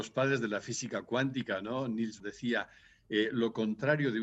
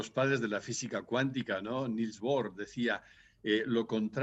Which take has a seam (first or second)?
first